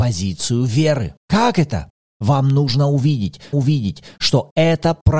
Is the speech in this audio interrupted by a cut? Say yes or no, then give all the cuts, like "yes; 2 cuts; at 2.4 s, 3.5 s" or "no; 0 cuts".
yes; 2 cuts; at 1.2 s, 3.5 s